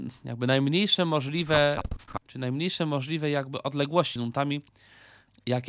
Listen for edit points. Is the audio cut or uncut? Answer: cut